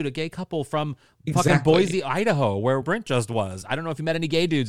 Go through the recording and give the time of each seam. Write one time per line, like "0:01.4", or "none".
0:02.8